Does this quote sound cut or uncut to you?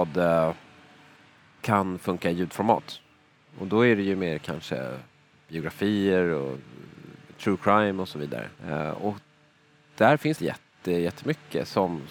cut